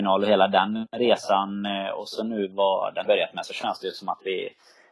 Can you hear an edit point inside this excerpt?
yes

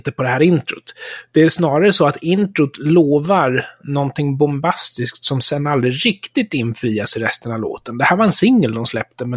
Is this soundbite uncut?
yes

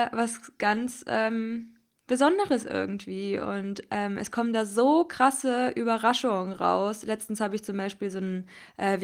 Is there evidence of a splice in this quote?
no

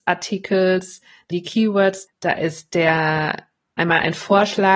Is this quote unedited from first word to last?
no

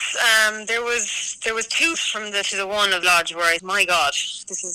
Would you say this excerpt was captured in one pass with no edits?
no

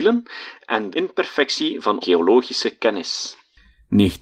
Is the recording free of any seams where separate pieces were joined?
no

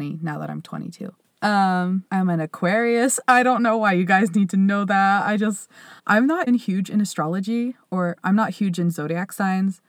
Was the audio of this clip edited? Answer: yes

